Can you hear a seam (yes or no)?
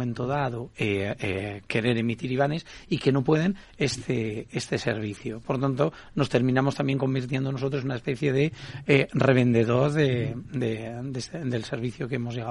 no